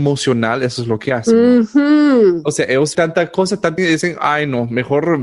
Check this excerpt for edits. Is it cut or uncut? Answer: cut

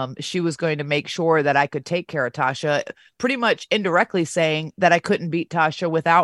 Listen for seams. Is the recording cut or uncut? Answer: uncut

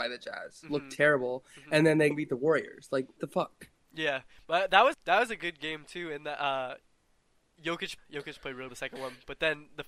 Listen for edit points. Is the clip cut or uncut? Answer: cut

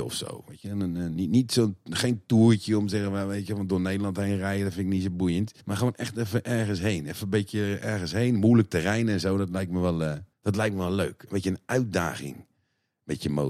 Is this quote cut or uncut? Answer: cut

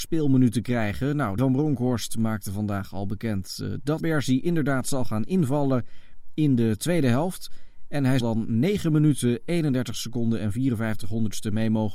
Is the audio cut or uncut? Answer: cut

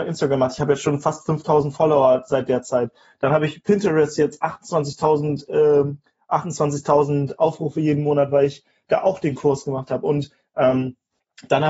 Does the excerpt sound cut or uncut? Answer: uncut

